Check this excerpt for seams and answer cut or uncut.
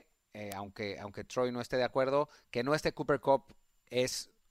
uncut